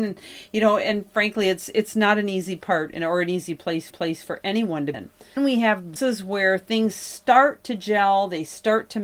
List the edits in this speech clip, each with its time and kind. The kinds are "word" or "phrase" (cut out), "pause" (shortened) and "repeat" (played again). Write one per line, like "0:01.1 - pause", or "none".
0:03.9 - repeat
0:04.9 - word
0:05.4 - word
0:06.0 - phrase

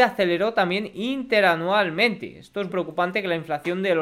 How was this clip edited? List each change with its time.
0:02.7 - word

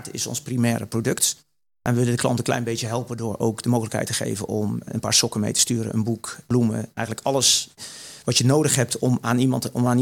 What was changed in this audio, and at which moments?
none

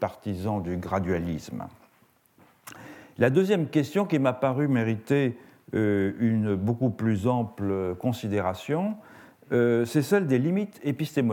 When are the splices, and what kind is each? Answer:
none

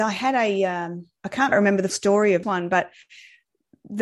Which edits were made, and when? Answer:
0:01.2 - pause
0:01.5 - word
0:01.9 - word
0:02.4 - word

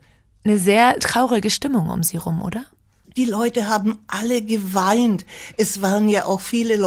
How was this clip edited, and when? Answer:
0:01.0 - word

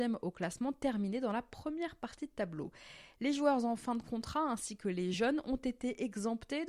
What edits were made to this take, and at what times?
none

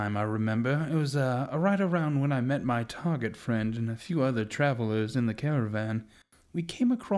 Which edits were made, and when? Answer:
none

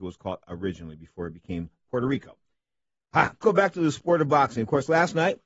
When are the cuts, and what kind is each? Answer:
0:03.4 - word

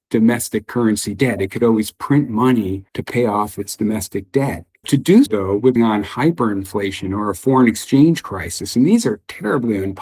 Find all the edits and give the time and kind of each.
0:02.9 - pause
0:05.3 - word
0:05.8 - phrase

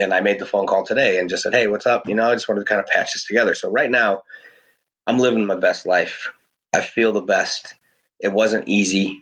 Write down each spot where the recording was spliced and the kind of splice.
none

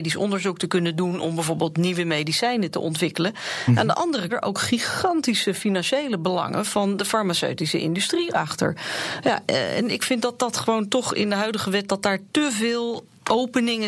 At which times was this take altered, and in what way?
0:04.3 - phrase

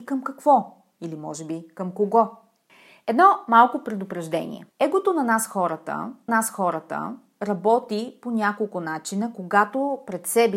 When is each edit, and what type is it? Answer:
0:04.7 - pause
0:06.3 - repeat

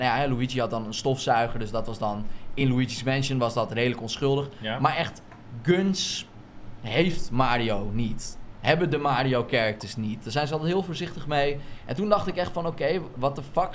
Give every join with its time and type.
none

